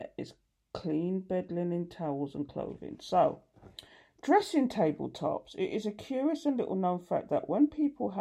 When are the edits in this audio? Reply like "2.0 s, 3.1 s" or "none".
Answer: none